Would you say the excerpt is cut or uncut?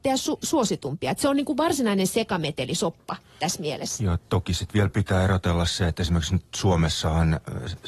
uncut